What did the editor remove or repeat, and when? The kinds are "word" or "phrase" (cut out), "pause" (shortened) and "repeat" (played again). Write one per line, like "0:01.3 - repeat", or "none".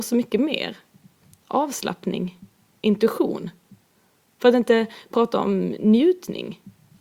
none